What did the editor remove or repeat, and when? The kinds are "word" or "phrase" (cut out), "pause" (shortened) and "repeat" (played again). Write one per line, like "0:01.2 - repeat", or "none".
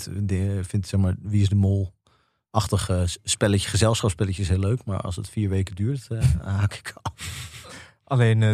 none